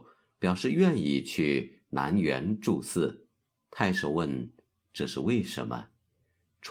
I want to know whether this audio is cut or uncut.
cut